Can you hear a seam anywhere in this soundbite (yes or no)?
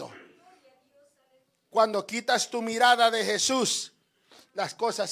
no